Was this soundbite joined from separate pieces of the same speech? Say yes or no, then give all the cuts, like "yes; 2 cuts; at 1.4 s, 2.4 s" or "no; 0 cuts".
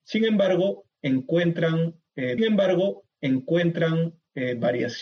yes; 1 cut; at 2.4 s